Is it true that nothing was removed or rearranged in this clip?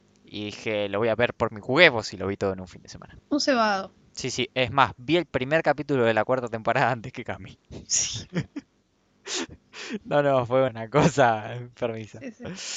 no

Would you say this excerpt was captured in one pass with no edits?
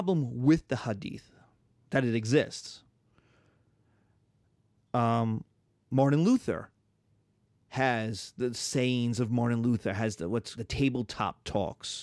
no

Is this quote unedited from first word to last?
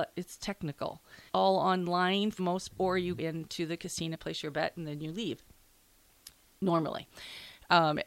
no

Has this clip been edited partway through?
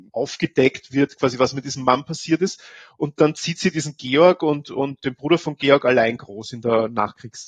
no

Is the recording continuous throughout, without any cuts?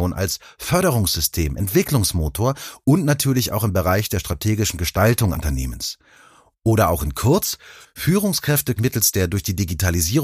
no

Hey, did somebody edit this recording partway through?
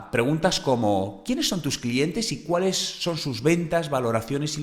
no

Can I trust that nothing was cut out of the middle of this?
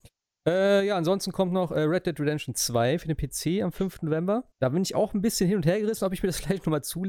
no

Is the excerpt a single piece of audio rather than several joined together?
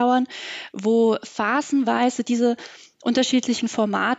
yes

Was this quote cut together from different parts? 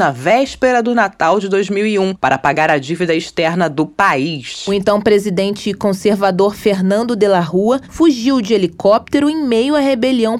no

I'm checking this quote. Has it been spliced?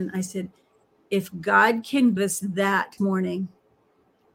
yes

